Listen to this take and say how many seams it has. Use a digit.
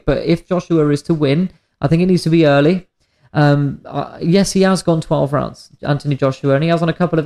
0